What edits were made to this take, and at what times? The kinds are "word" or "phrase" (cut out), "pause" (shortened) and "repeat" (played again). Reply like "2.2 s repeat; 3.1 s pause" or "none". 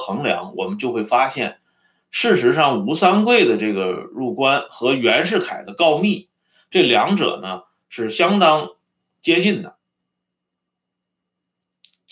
none